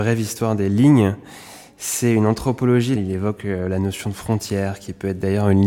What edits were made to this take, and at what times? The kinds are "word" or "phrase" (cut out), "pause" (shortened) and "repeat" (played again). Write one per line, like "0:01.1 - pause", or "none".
0:03.0 - phrase